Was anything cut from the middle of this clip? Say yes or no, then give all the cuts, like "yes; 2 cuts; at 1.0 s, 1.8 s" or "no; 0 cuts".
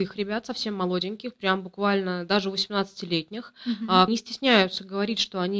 yes; 1 cut; at 4.1 s